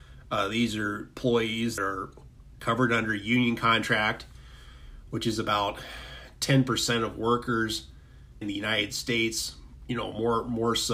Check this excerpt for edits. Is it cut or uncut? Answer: cut